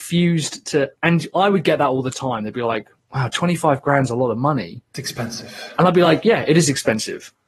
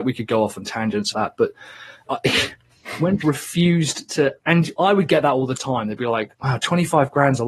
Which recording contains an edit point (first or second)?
second